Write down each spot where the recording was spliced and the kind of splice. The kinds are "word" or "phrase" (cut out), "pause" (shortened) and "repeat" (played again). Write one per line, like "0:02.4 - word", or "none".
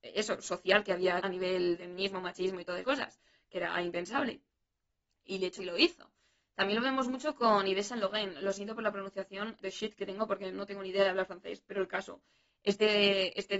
0:01.2 - word
0:01.8 - word
0:02.8 - word
0:05.6 - word
0:09.6 - word
0:10.5 - word